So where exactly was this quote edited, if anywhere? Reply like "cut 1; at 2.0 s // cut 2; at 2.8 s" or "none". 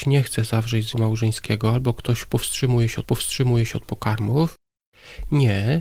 cut 1; at 0.9 s // cut 2; at 3.0 s